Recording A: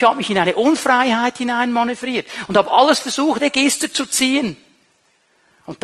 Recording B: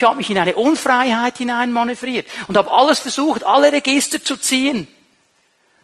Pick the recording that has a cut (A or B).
A